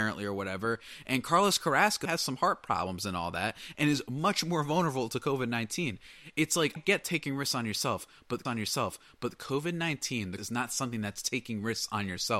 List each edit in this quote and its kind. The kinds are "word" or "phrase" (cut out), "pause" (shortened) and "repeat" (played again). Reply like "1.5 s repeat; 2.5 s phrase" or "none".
2.1 s word; 6.8 s word; 8.5 s repeat; 10.4 s word